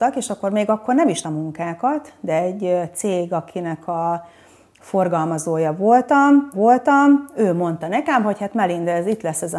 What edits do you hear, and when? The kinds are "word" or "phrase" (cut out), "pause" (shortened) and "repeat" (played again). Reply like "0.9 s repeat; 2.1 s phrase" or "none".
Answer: 1.2 s phrase; 6.5 s repeat